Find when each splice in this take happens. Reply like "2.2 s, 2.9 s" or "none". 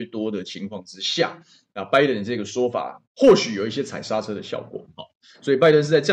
3.0 s